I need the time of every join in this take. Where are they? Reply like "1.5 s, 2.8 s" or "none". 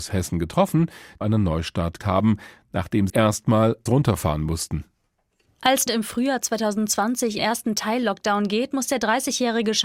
1.2 s, 2.0 s, 3.1 s, 3.9 s, 5.9 s, 7.4 s